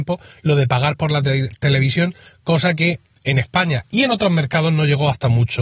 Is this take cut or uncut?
uncut